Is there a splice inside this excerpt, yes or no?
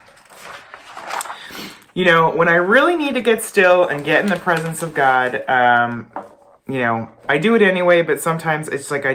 no